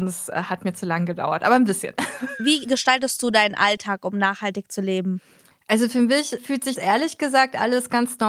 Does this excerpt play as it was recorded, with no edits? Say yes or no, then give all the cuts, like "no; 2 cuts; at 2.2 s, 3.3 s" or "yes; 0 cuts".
no; 2 cuts; at 6.4 s, 6.8 s